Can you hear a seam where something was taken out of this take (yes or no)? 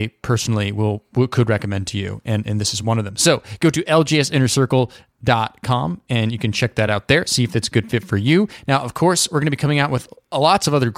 no